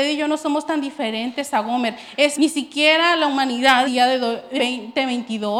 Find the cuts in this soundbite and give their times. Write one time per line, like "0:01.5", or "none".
0:02.4
0:03.8
0:04.6